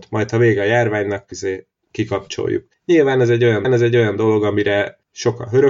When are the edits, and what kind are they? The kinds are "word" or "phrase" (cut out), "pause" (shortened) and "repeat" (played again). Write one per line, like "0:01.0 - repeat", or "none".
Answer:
0:01.3 - word
0:03.6 - repeat